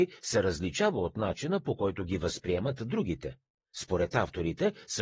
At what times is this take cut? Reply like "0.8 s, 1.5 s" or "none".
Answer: none